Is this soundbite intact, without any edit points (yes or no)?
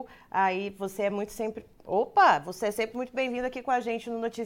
yes